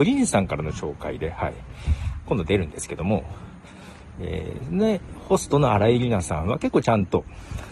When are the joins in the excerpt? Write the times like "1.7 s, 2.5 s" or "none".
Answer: none